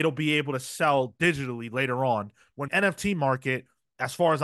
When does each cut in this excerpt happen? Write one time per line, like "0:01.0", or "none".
0:02.7